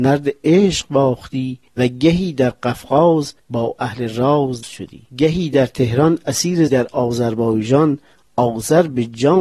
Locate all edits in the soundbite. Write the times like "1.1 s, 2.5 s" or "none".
1.7 s, 3.4 s, 4.6 s, 5.1 s, 6.7 s

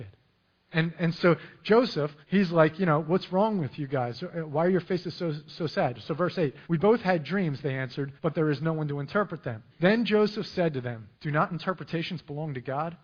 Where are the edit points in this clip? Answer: 2.2 s, 6.6 s, 8.2 s, 9.7 s, 11.1 s

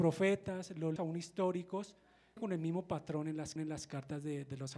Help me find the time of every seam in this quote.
1.0 s, 2.4 s, 3.6 s

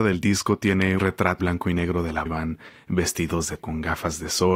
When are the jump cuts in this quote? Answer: 1.0 s, 1.4 s, 2.3 s, 3.6 s

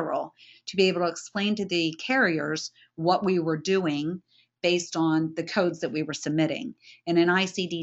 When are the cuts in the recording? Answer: none

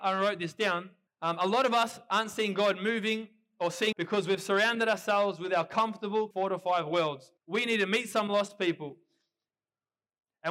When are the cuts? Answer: 1.1 s, 3.9 s, 6.3 s, 7.4 s

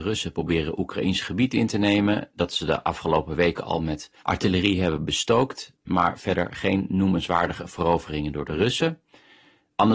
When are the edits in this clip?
4.2 s

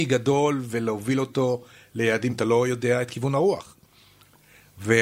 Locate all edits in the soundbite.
2.3 s

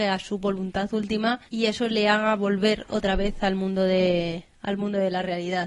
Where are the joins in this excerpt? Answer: 1.5 s

